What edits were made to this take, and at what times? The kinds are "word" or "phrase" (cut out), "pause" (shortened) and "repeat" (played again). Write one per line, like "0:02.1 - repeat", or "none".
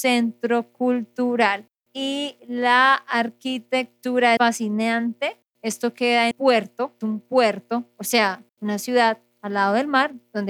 0:01.8 - pause
0:04.4 - word
0:05.5 - pause
0:06.3 - word
0:07.0 - word
0:08.5 - pause

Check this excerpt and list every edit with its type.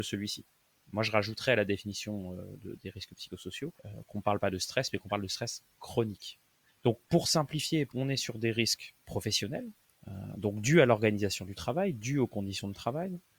0:03.8 - pause
0:07.0 - pause

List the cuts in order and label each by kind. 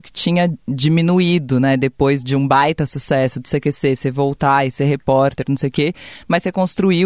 none

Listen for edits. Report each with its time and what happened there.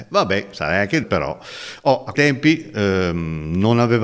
0:01.0 - word
0:02.1 - word

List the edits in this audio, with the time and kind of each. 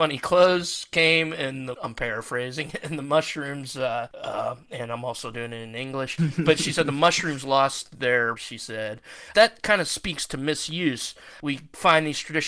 0:01.7 - word
0:08.4 - word

